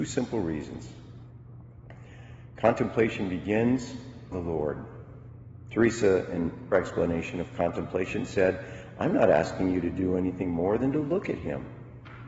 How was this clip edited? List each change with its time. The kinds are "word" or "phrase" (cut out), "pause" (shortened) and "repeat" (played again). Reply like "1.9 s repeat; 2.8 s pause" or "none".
4.3 s phrase; 6.7 s word

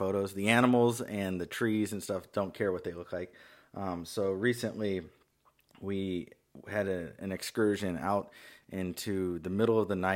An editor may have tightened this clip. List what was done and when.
none

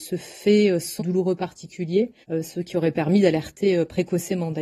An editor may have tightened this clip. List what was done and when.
1.0 s word; 2.2 s pause

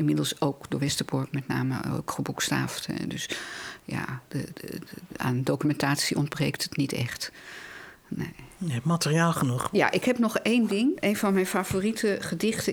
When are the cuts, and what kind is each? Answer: 4.5 s word

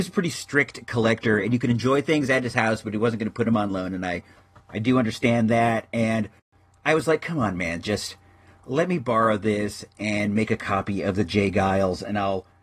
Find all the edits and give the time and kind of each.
none

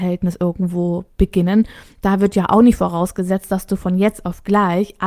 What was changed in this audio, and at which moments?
none

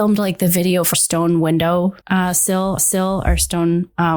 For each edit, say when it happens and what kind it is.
0.9 s word; 2.0 s pause; 2.8 s repeat

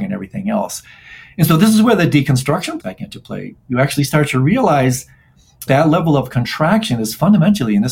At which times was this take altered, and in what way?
2.8 s phrase; 5.7 s word

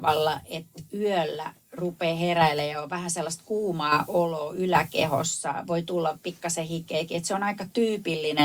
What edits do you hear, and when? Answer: none

